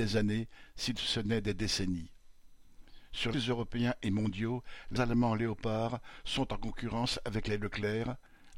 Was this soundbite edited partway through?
yes; 2 cuts; at 3.3 s, 5.0 s

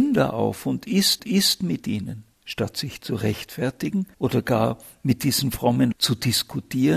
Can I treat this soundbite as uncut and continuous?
no; 4 cuts; at 1.2 s, 2.3 s, 4.1 s, 5.9 s

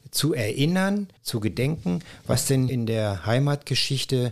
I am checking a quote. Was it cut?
yes; 2 cuts; at 1.2 s, 2.7 s

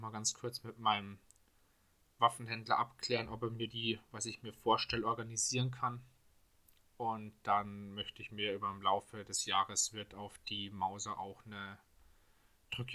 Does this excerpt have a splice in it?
no; 0 cuts

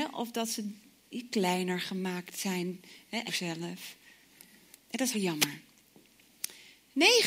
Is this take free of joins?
no; 2 cuts; at 3.3 s, 5.1 s

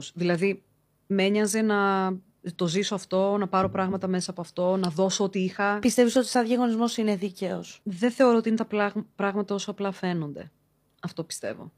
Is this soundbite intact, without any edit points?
yes; 0 cuts

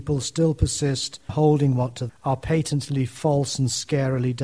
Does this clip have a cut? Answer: yes; 2 cuts; at 1.3 s, 2.1 s

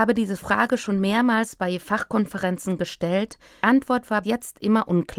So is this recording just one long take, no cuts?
no; 2 cuts; at 3.6 s, 4.2 s

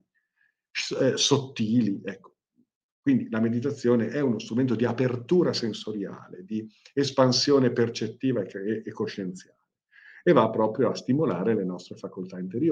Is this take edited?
no; 0 cuts

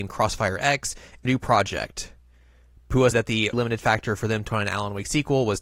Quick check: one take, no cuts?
no; 4 cuts; at 1.2 s, 3.1 s, 3.5 s, 4.5 s

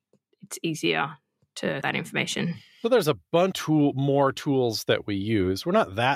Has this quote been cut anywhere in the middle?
yes; 2 cuts; at 1.8 s, 3.5 s

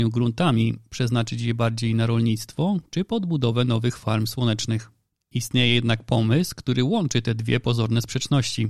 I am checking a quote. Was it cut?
no; 0 cuts

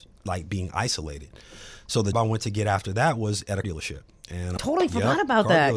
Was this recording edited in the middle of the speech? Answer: yes; 3 cuts; at 2.1 s, 3.6 s, 4.6 s

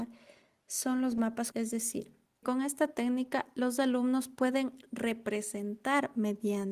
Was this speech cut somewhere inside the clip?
yes; 2 cuts; at 1.5 s, 2.4 s

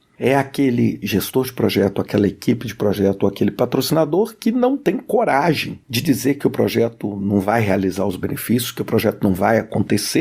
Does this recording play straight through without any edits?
yes; 0 cuts

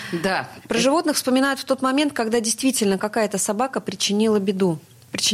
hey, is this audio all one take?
yes; 0 cuts

